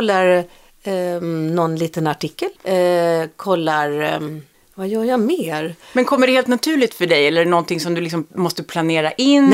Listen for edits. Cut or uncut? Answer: cut